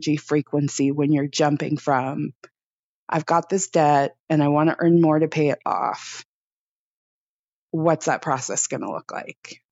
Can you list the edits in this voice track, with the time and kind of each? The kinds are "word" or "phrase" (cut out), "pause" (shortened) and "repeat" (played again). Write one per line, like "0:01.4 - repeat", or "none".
none